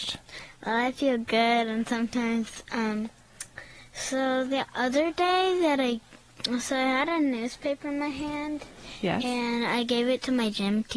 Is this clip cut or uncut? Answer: uncut